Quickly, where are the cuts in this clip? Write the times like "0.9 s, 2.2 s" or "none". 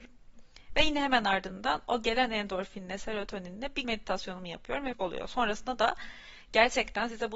3.8 s, 4.9 s